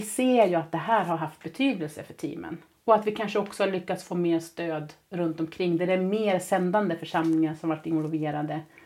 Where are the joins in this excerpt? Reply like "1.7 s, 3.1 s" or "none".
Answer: none